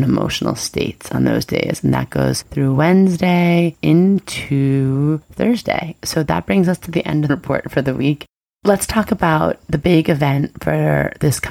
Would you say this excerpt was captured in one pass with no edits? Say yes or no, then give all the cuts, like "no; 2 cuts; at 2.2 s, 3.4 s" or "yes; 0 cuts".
no; 1 cut; at 7.3 s